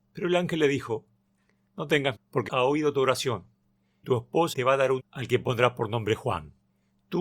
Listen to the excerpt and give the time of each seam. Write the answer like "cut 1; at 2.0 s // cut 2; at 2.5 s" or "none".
cut 1; at 1.7 s // cut 2; at 2.1 s // cut 3; at 2.5 s // cut 4; at 4.0 s // cut 5; at 4.5 s // cut 6; at 5.0 s